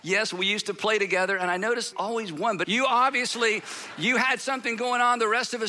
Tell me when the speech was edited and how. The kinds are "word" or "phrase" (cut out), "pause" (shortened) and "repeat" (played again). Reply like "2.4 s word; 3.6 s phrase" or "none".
1.9 s word; 2.6 s word